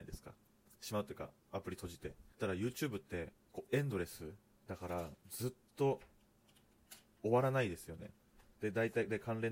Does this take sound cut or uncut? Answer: cut